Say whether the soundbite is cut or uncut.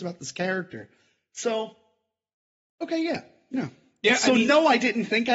uncut